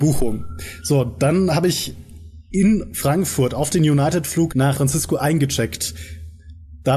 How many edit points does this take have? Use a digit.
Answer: 1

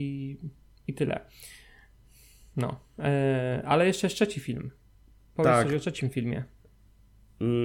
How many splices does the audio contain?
0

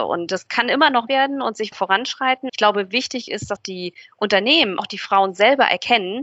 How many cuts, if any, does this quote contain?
5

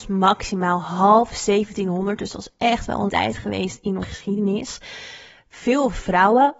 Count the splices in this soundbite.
2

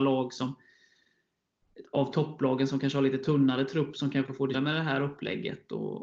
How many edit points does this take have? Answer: 1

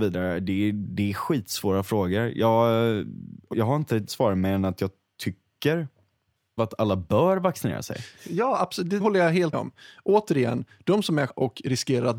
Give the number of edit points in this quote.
7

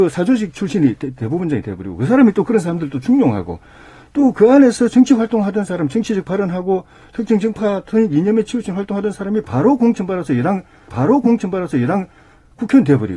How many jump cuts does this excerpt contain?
1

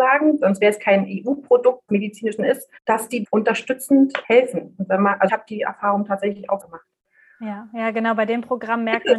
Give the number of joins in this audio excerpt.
7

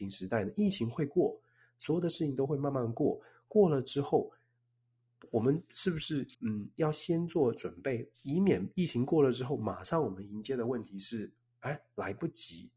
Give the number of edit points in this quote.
1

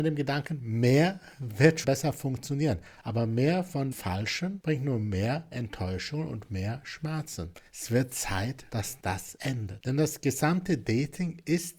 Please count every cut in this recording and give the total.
3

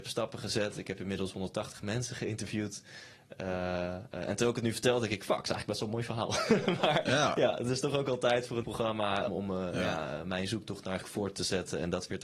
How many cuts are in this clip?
3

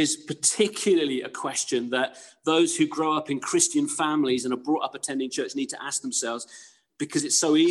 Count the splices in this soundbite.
0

